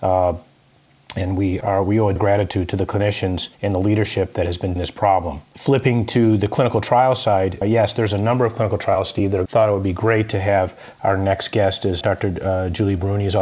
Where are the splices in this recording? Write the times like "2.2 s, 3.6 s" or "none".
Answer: 1.6 s, 2.2 s, 3.5 s, 4.8 s, 7.6 s, 9.5 s, 12.0 s